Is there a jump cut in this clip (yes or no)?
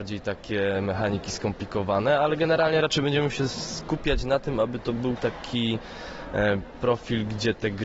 no